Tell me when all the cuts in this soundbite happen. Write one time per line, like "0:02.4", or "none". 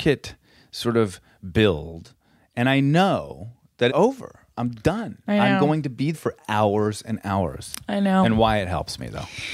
0:03.9
0:06.1